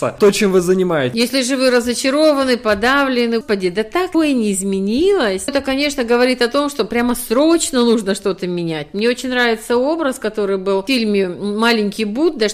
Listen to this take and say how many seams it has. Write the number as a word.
three